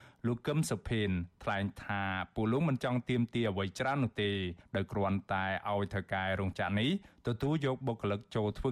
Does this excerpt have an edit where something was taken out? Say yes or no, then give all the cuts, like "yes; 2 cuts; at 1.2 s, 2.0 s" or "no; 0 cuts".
no; 0 cuts